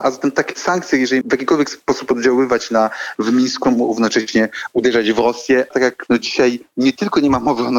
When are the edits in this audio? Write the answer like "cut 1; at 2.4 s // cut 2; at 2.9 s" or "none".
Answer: cut 1; at 1.2 s // cut 2; at 3.1 s // cut 3; at 3.6 s // cut 4; at 5.7 s // cut 5; at 6.1 s